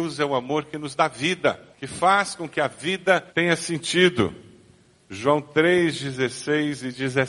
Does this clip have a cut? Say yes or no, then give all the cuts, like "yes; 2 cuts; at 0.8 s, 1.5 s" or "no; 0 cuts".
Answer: yes; 2 cuts; at 1.7 s, 3.3 s